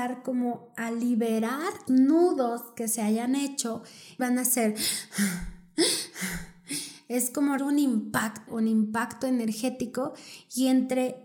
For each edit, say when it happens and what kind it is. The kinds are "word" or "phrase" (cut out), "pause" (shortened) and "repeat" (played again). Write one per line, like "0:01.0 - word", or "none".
0:01.9 - word
0:04.2 - phrase
0:07.6 - word
0:08.5 - word